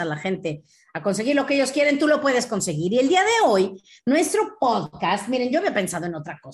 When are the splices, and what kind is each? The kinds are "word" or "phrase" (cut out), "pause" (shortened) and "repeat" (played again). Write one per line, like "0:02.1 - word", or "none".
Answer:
none